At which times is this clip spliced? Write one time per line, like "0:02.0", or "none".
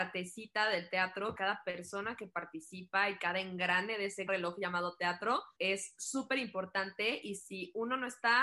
0:01.4
0:04.3
0:05.5